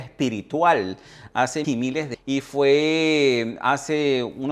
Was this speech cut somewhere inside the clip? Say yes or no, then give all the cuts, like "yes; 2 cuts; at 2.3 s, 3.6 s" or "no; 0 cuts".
yes; 2 cuts; at 1.6 s, 2.1 s